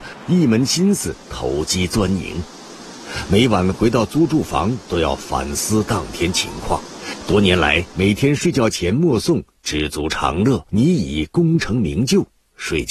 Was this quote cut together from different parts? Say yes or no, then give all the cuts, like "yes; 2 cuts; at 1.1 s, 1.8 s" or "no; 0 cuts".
yes; 1 cut; at 10.7 s